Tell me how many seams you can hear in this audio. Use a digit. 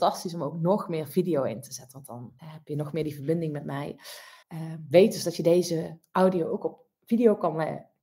2